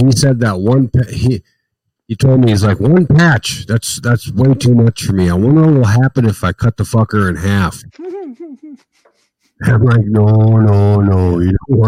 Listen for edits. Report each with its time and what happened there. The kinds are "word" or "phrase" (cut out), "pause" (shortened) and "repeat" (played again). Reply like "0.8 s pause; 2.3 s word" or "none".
none